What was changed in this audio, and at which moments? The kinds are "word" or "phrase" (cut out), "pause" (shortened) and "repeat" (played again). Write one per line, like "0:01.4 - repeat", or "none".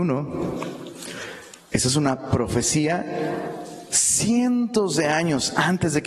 0:01.6 - pause